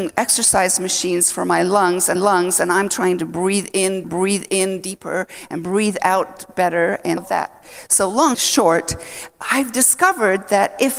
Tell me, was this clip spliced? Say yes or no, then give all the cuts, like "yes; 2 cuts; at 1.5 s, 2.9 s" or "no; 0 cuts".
yes; 4 cuts; at 2.2 s, 4.0 s, 7.2 s, 8.3 s